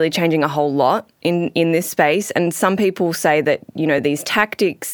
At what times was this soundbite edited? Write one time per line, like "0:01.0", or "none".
none